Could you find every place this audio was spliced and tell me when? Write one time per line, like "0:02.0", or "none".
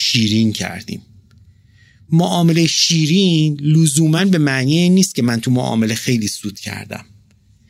none